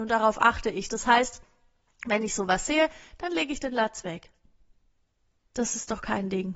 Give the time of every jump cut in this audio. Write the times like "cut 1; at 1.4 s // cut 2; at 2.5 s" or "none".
none